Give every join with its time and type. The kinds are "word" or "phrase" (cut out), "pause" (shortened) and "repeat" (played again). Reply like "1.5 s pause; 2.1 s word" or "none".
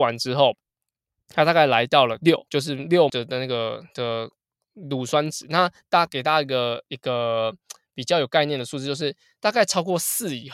2.5 s pause; 3.1 s word